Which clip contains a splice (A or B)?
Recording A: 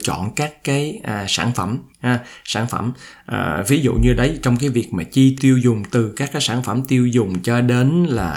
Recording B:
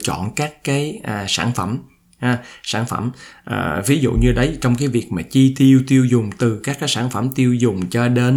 A